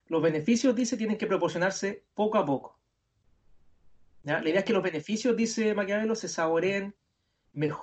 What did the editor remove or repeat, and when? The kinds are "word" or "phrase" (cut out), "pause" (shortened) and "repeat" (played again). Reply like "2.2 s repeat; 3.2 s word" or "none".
2.1 s pause